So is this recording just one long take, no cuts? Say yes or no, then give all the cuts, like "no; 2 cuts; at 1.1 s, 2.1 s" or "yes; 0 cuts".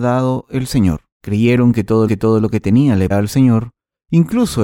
no; 3 cuts; at 1.1 s, 2.1 s, 3.1 s